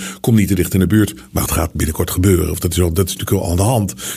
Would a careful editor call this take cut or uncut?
cut